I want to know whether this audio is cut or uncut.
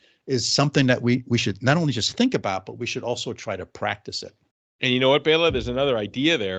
cut